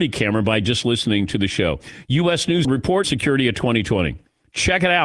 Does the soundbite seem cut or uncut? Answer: cut